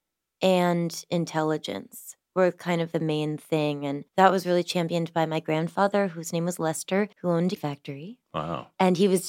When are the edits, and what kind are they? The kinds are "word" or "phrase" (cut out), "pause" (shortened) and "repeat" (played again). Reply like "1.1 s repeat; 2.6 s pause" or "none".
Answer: 2.9 s word; 4.1 s pause; 7.1 s pause; 7.6 s word